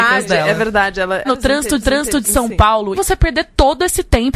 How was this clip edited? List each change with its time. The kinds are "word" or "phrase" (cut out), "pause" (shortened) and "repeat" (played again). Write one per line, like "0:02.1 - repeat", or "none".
0:01.2 - phrase
0:01.8 - repeat
0:02.9 - word